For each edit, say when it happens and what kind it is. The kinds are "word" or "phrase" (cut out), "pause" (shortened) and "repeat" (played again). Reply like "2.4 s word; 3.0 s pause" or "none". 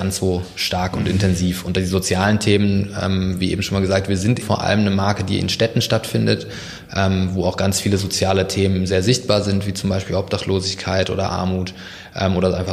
4.4 s word